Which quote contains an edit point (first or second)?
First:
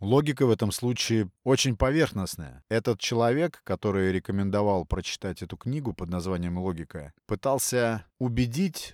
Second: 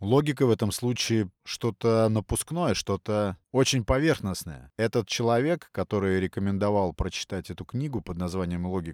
first